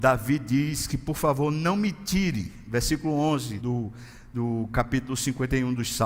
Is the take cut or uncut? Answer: cut